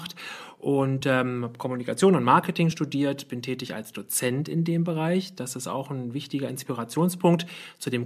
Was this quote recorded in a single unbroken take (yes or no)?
yes